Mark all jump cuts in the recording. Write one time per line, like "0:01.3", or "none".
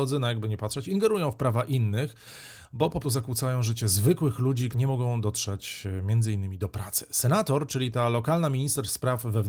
0:03.0
0:04.7